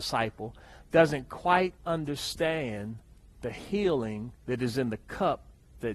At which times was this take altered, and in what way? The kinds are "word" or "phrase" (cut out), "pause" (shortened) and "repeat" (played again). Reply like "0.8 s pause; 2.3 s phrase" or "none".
1.8 s pause; 4.4 s pause